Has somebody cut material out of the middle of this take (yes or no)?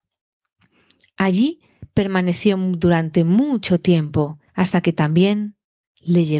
yes